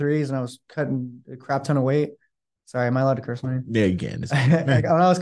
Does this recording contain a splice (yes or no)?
no